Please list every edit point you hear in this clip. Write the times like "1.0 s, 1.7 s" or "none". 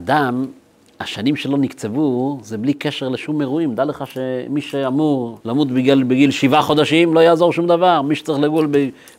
5.4 s